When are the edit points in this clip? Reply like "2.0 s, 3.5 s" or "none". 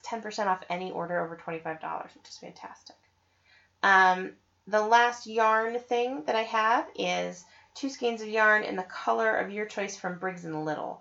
none